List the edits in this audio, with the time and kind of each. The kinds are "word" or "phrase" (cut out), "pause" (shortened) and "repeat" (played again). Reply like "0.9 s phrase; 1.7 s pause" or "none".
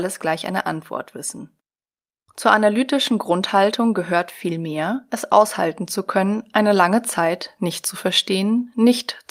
none